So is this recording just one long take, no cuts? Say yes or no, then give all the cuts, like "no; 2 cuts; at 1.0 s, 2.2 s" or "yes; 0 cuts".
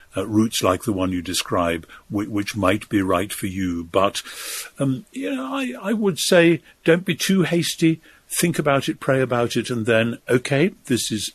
yes; 0 cuts